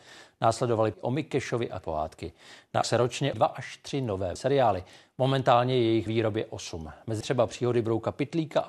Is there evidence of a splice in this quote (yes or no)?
yes